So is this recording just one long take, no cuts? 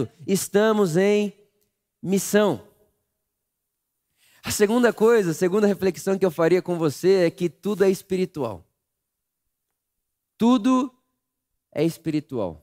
yes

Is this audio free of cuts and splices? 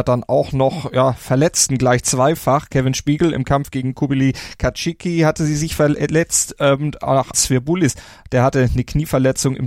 no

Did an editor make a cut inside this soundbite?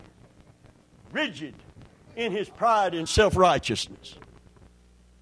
no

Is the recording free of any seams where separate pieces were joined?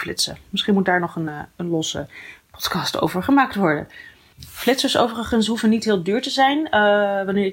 yes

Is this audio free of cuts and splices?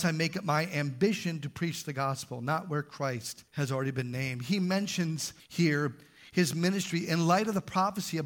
no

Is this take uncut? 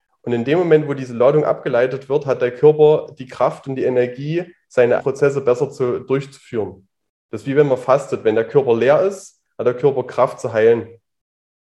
no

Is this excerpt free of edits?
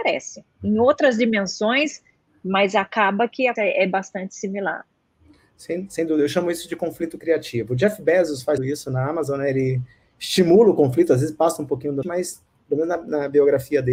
no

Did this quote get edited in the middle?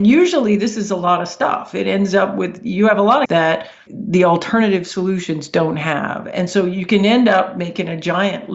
yes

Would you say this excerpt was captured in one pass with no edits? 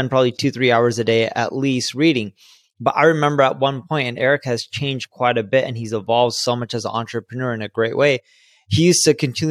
yes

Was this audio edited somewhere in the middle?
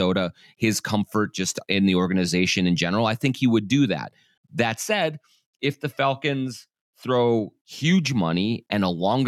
no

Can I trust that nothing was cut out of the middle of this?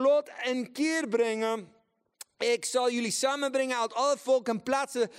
yes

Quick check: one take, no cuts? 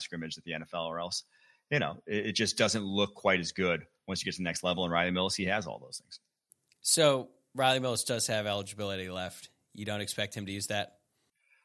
yes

